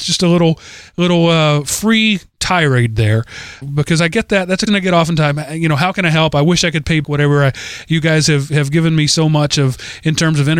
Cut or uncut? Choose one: cut